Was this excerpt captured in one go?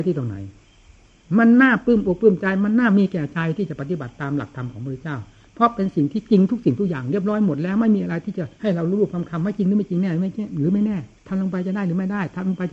no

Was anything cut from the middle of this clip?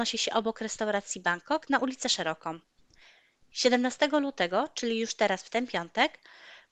no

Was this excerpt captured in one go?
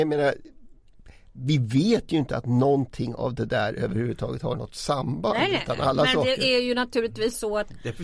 yes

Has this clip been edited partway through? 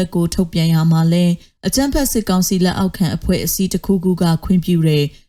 no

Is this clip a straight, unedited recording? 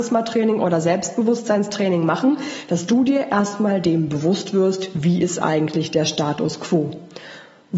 yes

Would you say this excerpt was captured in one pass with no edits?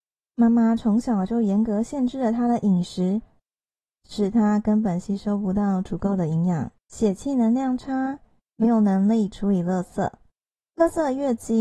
no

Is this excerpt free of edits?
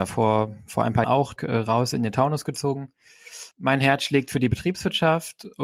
no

